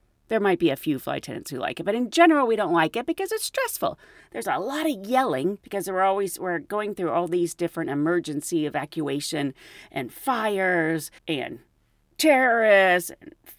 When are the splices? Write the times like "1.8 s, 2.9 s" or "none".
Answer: 5.6 s, 11.2 s